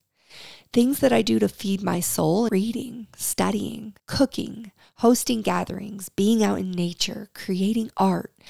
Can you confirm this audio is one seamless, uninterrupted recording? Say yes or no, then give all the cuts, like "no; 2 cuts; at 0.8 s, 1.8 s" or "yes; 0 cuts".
no; 2 cuts; at 2.5 s, 4.0 s